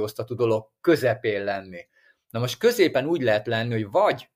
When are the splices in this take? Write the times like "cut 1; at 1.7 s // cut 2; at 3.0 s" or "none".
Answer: none